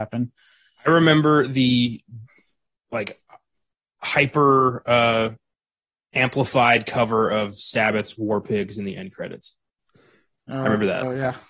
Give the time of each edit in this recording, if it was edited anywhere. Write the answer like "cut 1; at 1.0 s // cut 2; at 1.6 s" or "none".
none